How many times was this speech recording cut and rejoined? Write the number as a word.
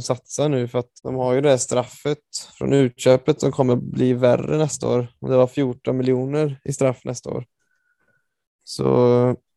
two